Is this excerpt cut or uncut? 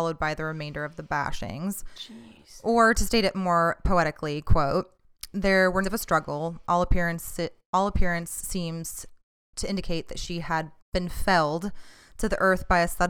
cut